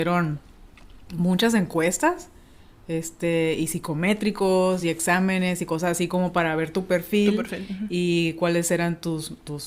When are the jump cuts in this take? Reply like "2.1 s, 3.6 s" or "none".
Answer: none